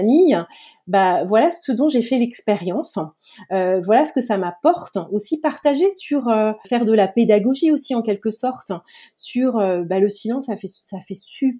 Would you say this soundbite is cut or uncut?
uncut